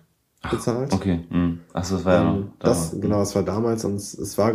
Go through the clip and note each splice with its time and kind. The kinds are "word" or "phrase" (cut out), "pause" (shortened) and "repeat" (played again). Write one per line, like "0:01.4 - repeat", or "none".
none